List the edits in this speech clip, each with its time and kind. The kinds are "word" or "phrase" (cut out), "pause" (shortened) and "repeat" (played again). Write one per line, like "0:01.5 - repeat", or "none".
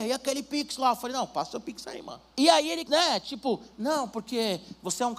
0:02.3 - pause
0:02.9 - word